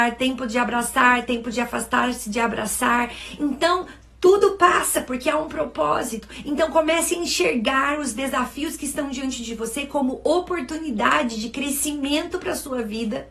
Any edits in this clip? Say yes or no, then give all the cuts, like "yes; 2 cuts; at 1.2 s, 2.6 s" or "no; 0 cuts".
no; 0 cuts